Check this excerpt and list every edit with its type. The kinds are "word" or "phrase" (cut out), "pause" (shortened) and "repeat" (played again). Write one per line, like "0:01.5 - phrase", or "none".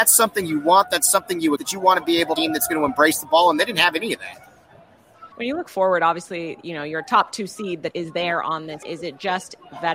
0:01.6 - word
0:02.4 - phrase
0:05.3 - pause
0:07.9 - word
0:08.8 - word